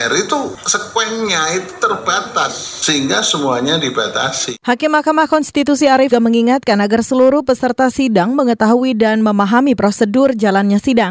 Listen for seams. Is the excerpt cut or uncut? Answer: cut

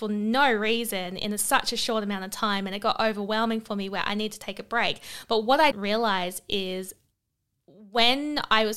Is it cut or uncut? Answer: cut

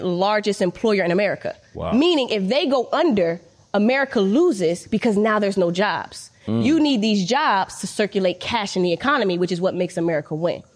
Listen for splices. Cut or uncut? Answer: uncut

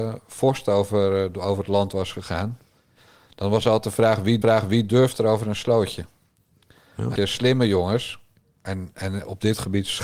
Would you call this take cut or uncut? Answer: cut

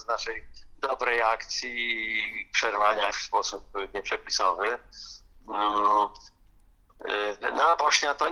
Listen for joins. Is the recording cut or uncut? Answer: cut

